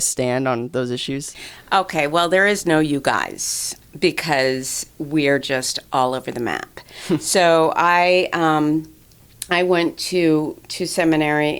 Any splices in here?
no; 0 cuts

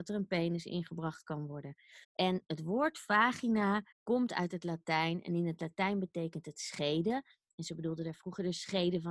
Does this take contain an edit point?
yes; 2 cuts; at 2.0 s, 3.9 s

